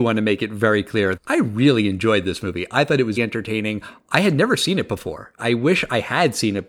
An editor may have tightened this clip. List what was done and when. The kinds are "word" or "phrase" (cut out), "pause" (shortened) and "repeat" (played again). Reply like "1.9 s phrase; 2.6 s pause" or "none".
1.2 s word; 3.2 s word